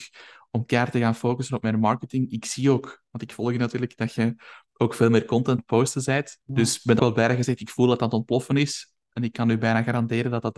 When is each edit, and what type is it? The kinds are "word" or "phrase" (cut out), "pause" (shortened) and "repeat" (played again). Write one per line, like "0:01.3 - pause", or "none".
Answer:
0:05.6 - word
0:06.4 - pause
0:07.0 - word